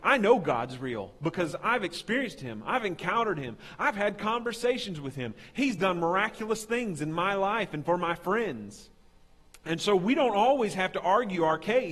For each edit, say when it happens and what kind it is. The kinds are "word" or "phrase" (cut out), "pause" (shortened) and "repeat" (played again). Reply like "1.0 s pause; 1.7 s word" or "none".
none